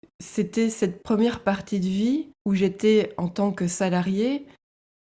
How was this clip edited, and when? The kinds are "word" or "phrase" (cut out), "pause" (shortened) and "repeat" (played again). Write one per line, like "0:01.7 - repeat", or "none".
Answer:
0:02.4 - pause